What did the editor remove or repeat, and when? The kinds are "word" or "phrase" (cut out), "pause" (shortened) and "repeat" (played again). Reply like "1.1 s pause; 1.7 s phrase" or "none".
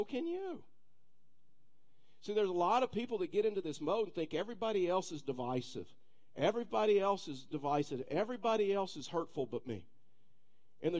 none

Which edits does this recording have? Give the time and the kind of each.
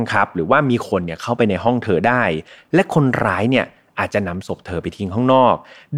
none

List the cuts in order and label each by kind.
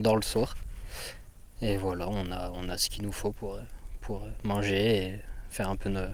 none

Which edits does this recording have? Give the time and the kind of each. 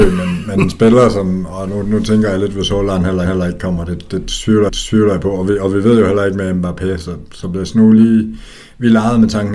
3.3 s repeat; 4.7 s repeat

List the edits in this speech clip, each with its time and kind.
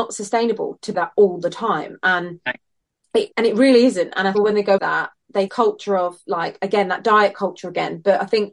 0.9 s phrase; 3.3 s pause; 4.3 s phrase; 4.8 s word; 5.5 s phrase

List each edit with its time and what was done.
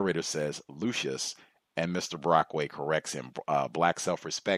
none

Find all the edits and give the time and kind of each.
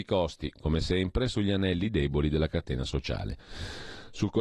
none

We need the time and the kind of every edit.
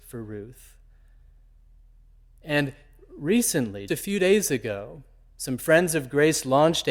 3.9 s word

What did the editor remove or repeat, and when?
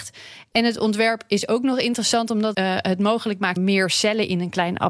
2.5 s word; 3.6 s word

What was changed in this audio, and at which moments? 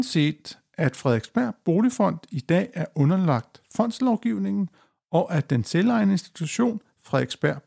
none

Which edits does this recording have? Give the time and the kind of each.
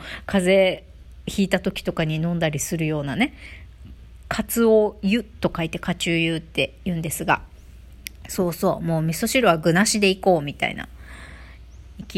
none

